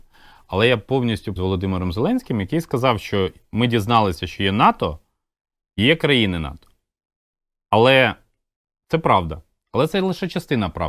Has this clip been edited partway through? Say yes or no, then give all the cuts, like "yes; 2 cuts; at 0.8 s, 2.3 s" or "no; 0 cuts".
yes; 1 cut; at 1.4 s